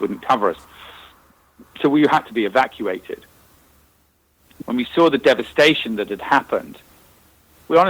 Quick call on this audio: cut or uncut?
cut